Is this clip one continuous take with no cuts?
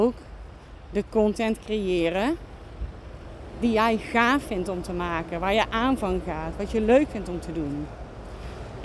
yes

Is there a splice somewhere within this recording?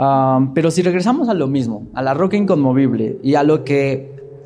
no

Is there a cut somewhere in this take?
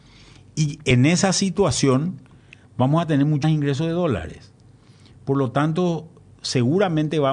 yes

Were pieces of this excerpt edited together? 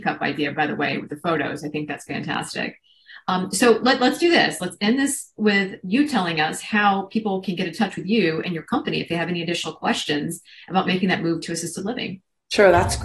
no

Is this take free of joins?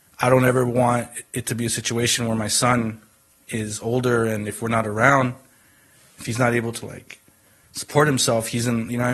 yes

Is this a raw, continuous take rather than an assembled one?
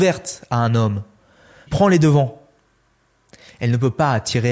no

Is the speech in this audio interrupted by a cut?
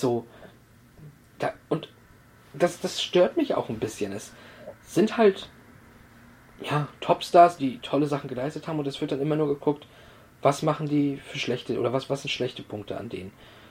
yes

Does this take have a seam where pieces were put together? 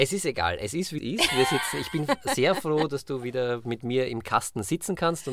yes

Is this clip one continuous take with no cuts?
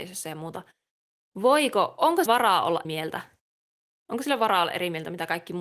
no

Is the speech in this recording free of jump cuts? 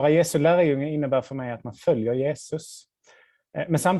yes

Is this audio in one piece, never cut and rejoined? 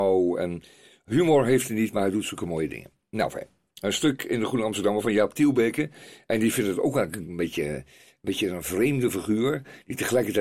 yes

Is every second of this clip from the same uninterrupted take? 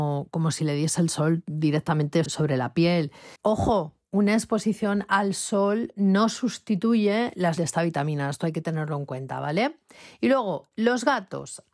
no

